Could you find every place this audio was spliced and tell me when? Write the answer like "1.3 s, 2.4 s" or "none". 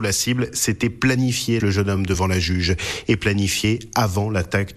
1.6 s

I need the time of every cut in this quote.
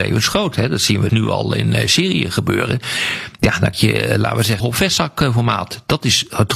1.1 s, 3.7 s, 4.6 s

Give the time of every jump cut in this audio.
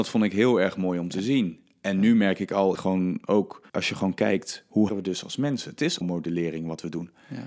2.7 s, 3.7 s, 4.9 s, 6.0 s

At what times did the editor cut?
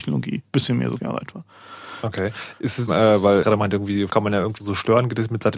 1.0 s, 2.9 s, 3.4 s, 4.1 s, 4.6 s

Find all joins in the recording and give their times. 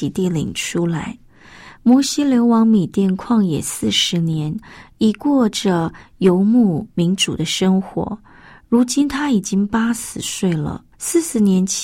10.9 s

